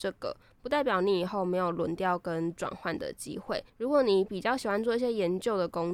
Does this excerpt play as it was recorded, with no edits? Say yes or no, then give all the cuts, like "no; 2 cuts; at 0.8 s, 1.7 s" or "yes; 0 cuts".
no; 1 cut; at 3.7 s